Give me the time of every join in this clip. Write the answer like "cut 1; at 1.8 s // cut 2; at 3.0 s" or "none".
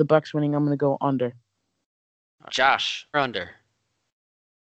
cut 1; at 2.5 s // cut 2; at 3.1 s